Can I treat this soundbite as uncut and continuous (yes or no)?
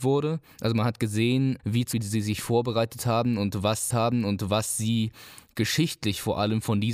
no